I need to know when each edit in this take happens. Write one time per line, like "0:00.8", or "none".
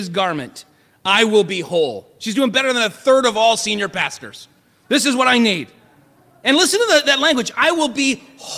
none